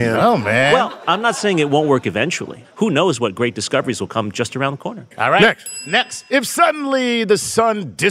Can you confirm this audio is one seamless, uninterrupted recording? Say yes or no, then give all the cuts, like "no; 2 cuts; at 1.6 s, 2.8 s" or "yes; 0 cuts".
yes; 0 cuts